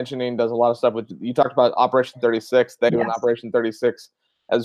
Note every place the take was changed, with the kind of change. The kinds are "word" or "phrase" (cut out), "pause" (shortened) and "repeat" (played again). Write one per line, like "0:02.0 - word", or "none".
0:02.9 - word